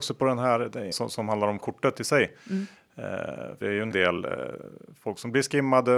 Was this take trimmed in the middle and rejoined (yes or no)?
yes